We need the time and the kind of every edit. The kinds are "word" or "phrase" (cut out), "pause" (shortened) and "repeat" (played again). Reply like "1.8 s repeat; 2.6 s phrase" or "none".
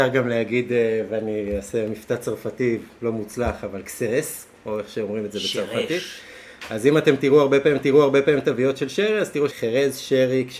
7.8 s repeat; 9.5 s phrase